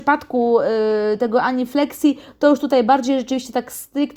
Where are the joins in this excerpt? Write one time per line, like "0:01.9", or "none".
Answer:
none